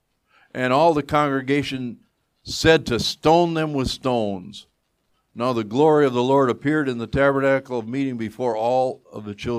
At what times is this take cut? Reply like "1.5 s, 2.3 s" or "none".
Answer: none